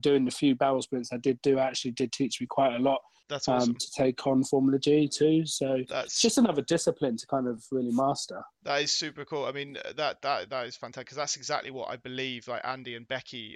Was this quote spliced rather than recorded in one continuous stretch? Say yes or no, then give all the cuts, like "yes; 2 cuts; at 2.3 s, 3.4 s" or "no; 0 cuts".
no; 0 cuts